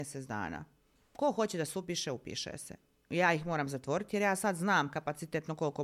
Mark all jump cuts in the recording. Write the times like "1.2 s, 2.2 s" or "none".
none